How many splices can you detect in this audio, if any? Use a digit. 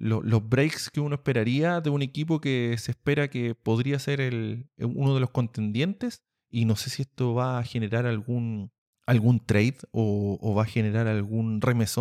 0